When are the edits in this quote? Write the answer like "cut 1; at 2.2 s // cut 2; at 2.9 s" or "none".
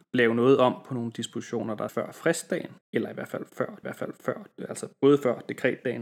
cut 1; at 1.9 s // cut 2; at 2.8 s // cut 3; at 3.8 s